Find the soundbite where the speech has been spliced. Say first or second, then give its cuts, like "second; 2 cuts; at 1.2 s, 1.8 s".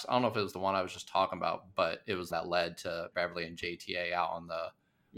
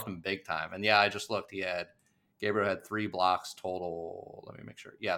first; 2 cuts; at 2.3 s, 3.1 s